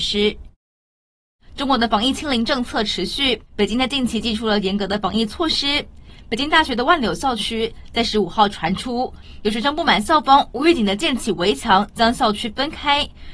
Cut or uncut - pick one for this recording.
cut